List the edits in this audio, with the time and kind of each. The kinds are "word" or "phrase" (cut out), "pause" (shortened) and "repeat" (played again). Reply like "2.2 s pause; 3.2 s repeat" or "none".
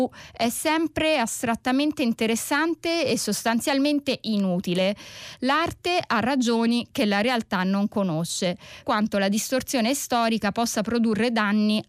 8.8 s word